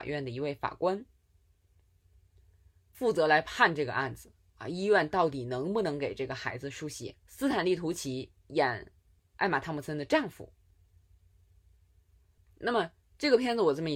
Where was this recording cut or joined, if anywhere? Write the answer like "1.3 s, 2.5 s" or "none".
7.2 s